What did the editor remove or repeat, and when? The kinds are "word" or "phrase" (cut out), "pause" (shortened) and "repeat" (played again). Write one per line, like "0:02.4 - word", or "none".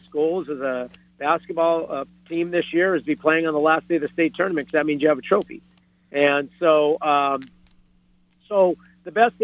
none